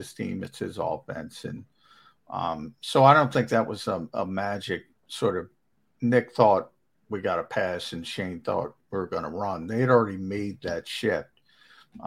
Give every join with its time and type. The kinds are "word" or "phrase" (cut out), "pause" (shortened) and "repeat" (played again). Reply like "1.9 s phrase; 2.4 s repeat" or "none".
none